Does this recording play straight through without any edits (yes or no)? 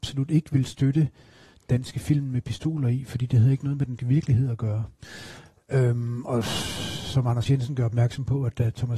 no